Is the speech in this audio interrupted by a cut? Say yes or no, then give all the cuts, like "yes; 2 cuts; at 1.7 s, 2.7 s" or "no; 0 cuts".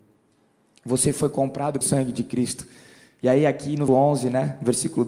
yes; 2 cuts; at 1.8 s, 3.9 s